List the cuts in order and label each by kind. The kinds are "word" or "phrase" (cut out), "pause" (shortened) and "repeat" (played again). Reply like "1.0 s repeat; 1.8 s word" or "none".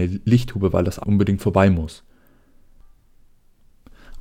1.0 s phrase